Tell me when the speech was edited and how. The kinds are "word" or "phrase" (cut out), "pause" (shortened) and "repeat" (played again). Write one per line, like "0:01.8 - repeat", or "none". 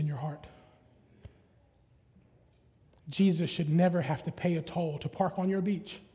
none